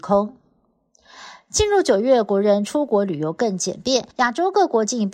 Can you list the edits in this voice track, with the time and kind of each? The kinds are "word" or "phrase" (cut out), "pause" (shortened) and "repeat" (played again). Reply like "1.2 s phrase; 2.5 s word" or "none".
4.1 s pause